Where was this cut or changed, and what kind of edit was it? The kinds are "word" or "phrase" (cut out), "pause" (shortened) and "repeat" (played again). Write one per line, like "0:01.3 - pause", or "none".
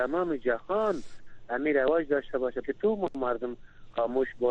0:02.6 - word